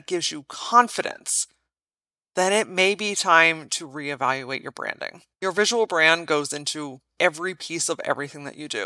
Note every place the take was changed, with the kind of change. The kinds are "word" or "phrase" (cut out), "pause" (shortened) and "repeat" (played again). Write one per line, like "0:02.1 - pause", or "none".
0:05.3 - pause
0:07.1 - pause